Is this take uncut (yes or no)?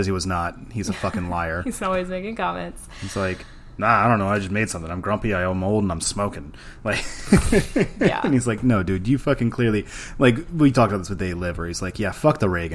yes